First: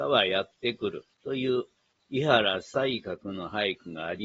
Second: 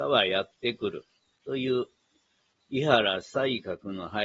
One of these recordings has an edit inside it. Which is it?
first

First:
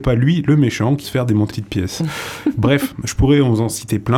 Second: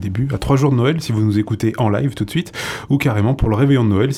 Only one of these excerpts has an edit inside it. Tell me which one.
first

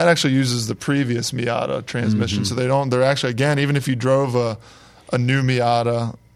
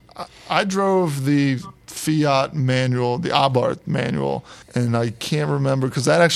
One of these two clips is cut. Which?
second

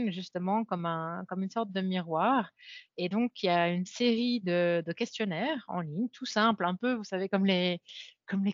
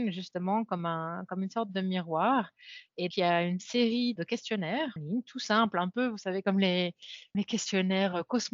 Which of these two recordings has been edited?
second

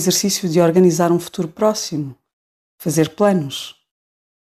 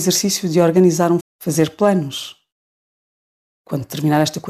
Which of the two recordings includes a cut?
second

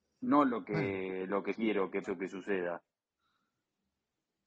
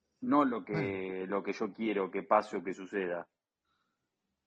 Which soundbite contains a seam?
first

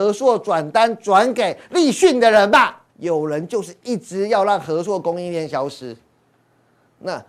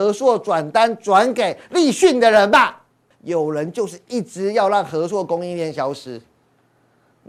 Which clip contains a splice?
first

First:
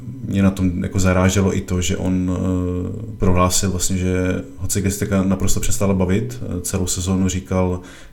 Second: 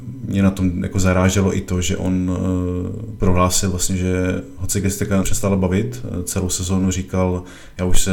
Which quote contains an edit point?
second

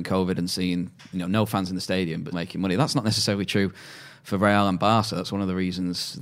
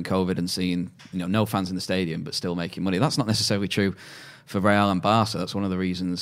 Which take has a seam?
first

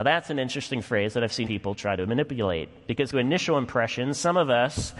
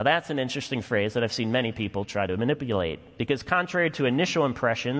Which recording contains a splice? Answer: first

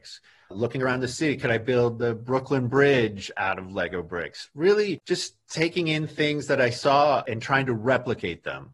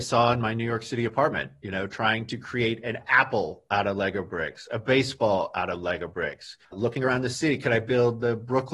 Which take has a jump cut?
second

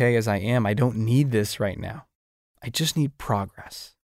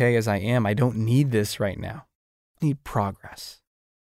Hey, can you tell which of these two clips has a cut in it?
second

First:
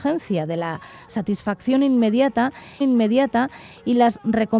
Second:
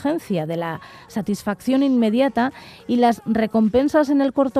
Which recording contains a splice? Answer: first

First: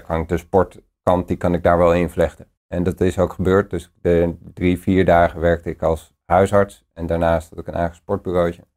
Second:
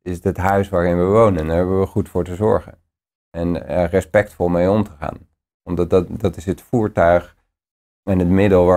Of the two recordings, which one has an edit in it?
first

